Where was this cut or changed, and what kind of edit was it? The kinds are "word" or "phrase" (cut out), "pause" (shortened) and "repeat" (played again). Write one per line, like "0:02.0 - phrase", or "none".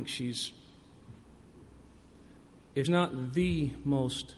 0:02.8 - word